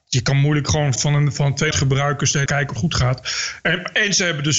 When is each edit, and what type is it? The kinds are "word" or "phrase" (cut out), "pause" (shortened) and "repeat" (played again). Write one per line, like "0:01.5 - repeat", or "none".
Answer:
0:01.0 - word
0:01.7 - word
0:02.5 - word
0:02.8 - word